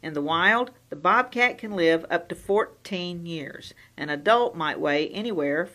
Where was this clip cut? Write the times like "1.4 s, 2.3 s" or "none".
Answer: none